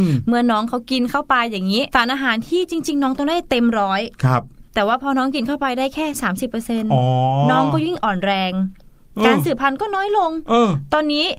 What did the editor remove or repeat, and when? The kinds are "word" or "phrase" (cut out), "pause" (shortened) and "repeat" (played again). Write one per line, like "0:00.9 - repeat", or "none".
0:01.9 - pause
0:04.7 - pause

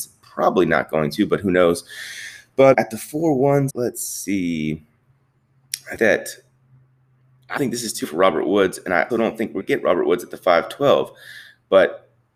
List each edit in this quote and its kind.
0:02.7 - word
0:03.7 - word
0:06.0 - word
0:07.6 - word
0:08.0 - word
0:09.1 - word
0:09.6 - word

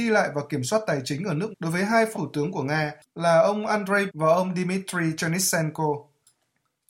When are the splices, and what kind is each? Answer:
0:01.5 - word
0:02.1 - word
0:04.1 - word

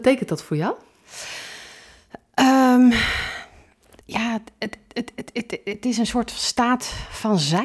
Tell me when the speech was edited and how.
0:04.0 - pause
0:04.9 - word

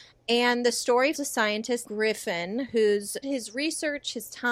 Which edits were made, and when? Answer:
0:01.1 - word
0:01.8 - word
0:03.2 - word

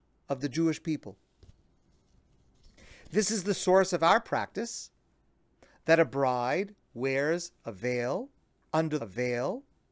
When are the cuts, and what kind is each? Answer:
0:09.0 - repeat

